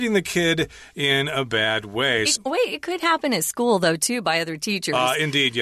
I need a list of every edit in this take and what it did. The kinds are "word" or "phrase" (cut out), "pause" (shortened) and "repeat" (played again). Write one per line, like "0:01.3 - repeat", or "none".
0:02.4 - word